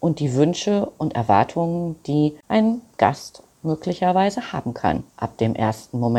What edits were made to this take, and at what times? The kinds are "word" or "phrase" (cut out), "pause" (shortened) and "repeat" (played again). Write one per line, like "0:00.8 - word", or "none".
0:02.4 - pause
0:05.1 - pause